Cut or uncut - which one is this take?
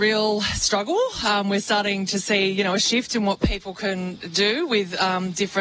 uncut